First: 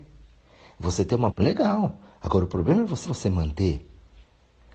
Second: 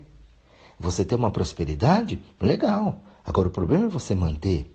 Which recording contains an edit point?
first; 2 cuts; at 1.3 s, 3.1 s

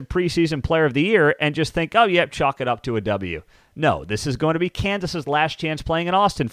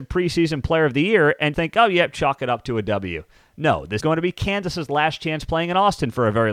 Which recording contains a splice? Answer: second; 2 cuts; at 1.5 s, 4.0 s

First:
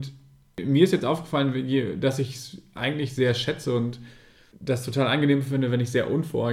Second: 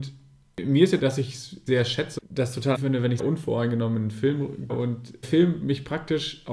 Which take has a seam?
second; 7 cuts; at 1.0 s, 1.7 s, 2.2 s, 2.7 s, 3.2 s, 4.7 s, 5.2 s

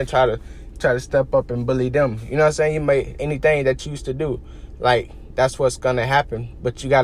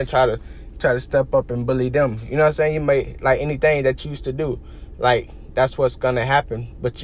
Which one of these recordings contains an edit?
first; 1 cut; at 3.2 s

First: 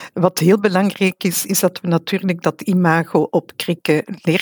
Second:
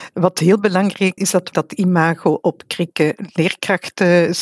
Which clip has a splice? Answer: second; 2 cuts; at 1.2 s, 1.5 s

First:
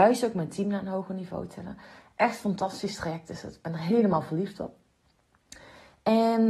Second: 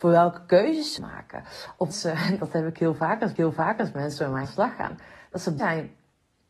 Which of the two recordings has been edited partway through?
second; 5 cuts; at 1.0 s, 1.9 s, 3.4 s, 4.4 s, 5.6 s

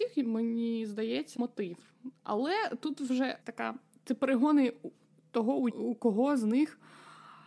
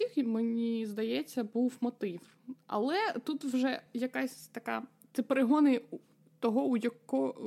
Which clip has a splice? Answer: first; 3 cuts; at 1.4 s, 3.4 s, 5.7 s

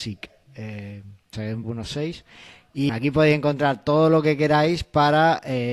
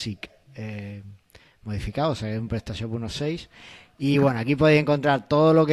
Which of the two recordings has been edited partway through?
first; 3 cuts; at 1.3 s, 1.6 s, 2.9 s

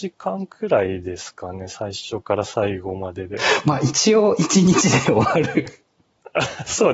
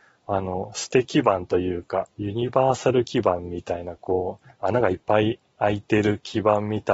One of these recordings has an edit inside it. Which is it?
second; 2 cuts; at 2.1 s, 5.5 s

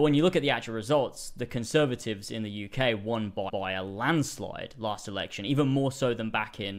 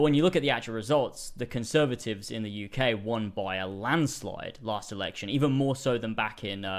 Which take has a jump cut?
first; 1 cut; at 3.5 s

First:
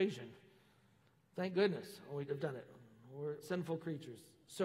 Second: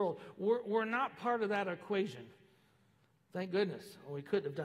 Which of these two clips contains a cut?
first; 2 cuts; at 2.3 s, 3.4 s

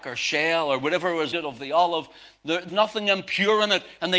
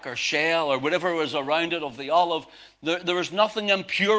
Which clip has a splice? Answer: first; 2 cuts; at 1.3 s, 2.7 s

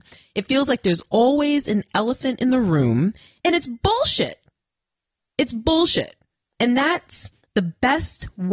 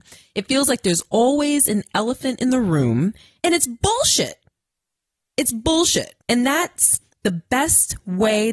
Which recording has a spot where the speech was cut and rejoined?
second; 1 cut; at 6.2 s

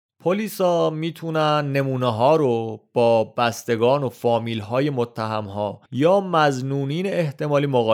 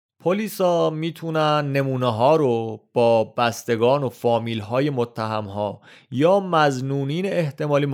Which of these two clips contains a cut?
first; 1 cut; at 5.9 s

